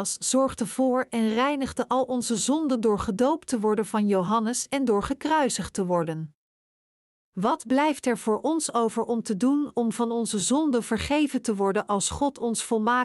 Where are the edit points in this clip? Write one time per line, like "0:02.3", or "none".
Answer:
none